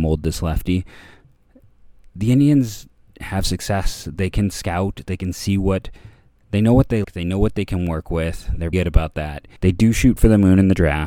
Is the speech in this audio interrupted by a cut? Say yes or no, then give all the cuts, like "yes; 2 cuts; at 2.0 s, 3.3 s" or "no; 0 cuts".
yes; 4 cuts; at 3.1 s, 7.0 s, 8.7 s, 9.6 s